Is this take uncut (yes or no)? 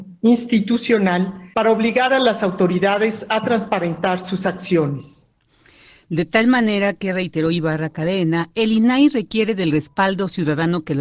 yes